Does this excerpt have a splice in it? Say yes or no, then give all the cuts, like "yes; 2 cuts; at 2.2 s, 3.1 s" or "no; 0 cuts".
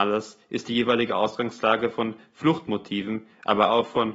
no; 0 cuts